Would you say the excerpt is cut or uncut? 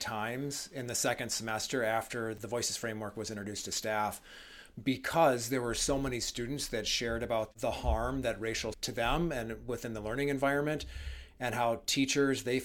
cut